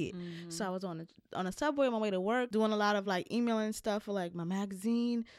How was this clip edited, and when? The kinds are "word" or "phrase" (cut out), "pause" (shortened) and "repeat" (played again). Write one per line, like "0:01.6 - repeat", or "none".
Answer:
none